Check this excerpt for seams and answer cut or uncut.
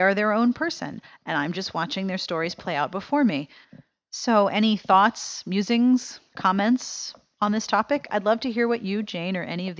uncut